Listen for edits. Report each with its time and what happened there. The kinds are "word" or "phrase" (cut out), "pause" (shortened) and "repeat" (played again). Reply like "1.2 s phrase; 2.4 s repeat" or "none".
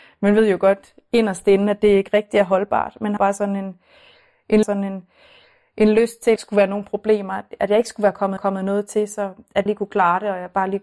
3.2 s word; 4.6 s repeat; 6.4 s phrase; 8.4 s repeat; 9.7 s phrase